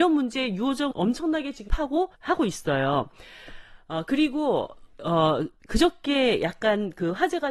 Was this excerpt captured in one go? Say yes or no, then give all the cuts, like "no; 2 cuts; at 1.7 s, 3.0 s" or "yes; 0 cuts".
no; 4 cuts; at 0.9 s, 1.7 s, 2.1 s, 4.9 s